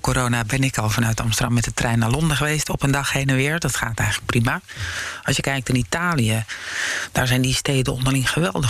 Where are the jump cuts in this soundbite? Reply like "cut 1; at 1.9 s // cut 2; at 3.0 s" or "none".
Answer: none